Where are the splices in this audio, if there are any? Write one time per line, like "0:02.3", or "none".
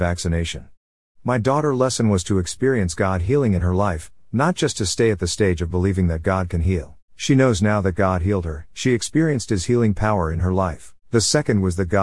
0:07.0
0:08.7
0:11.0